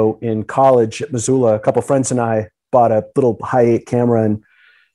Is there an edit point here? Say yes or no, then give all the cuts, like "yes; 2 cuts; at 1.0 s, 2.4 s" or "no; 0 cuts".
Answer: no; 0 cuts